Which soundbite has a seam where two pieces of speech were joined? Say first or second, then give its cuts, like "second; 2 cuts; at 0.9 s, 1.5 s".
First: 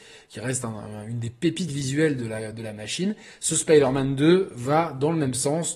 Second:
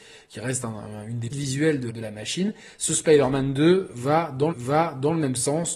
second; 3 cuts; at 1.3 s, 1.9 s, 4.5 s